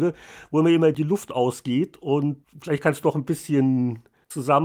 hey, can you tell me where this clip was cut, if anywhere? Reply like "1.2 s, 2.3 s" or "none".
0.9 s, 3.0 s